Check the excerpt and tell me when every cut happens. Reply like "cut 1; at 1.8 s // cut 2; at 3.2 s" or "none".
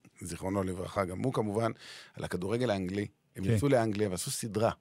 none